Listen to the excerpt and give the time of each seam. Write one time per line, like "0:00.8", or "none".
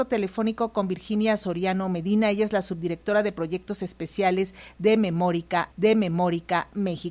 0:05.7